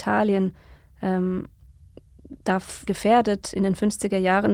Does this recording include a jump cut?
yes; 1 cut; at 2.9 s

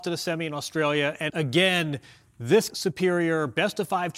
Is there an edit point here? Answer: yes; 2 cuts; at 1.3 s, 2.7 s

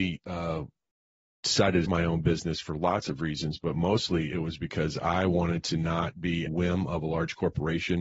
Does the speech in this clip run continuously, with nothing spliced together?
no; 2 cuts; at 1.9 s, 6.5 s

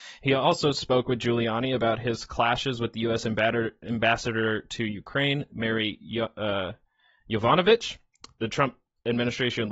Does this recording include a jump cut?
no; 0 cuts

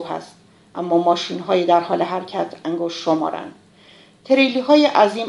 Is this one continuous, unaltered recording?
yes; 0 cuts

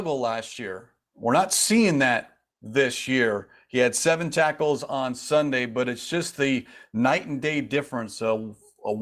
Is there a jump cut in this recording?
no; 0 cuts

